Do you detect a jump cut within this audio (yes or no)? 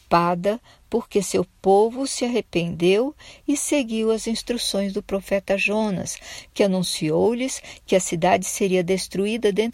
no